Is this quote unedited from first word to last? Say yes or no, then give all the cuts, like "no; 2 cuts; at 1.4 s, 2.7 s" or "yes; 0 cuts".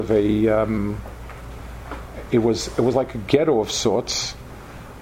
yes; 0 cuts